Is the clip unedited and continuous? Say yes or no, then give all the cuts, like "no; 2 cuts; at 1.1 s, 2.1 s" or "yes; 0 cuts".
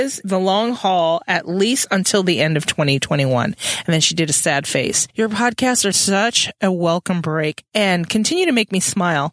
yes; 0 cuts